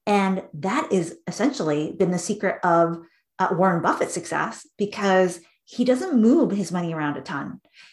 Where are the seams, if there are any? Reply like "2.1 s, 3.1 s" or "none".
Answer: none